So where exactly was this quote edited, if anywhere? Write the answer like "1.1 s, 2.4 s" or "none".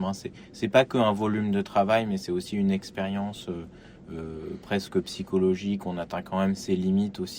none